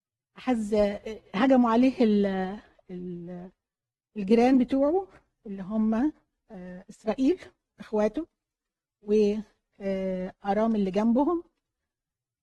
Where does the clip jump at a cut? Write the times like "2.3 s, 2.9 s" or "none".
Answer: none